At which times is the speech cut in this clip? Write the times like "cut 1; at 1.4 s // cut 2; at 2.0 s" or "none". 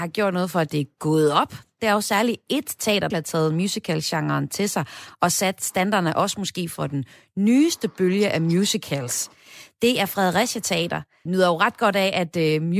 cut 1; at 3.1 s // cut 2; at 11.3 s